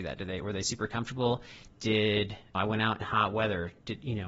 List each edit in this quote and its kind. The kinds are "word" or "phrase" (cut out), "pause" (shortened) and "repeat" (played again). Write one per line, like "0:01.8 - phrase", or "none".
0:02.5 - word
0:03.0 - word